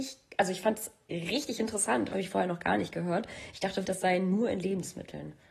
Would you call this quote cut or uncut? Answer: cut